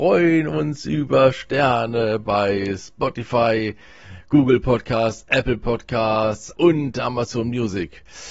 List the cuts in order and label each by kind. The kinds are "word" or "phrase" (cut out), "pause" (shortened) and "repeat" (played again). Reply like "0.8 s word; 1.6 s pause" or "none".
6.5 s word